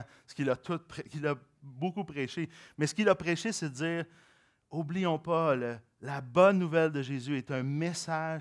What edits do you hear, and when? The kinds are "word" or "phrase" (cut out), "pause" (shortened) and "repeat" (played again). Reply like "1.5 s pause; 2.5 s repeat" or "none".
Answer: none